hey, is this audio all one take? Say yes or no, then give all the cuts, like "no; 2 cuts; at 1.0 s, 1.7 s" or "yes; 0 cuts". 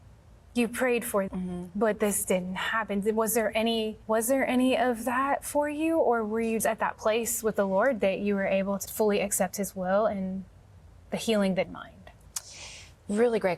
no; 5 cuts; at 1.3 s, 4.0 s, 6.6 s, 8.9 s, 11.6 s